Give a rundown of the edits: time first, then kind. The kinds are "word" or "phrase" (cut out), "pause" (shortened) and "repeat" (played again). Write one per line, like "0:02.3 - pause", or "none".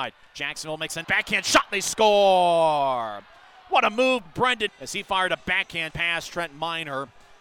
0:01.0 - word
0:04.3 - word
0:04.7 - word
0:05.9 - word